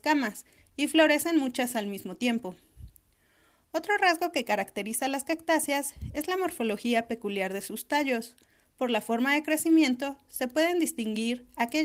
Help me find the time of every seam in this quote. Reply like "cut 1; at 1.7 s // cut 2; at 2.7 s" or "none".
none